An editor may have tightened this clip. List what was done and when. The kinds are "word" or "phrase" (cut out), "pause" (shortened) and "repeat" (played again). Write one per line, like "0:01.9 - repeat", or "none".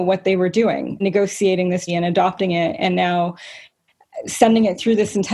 0:01.0 - word
0:01.9 - word